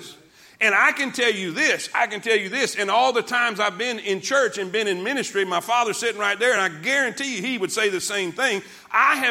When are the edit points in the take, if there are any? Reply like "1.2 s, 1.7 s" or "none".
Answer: none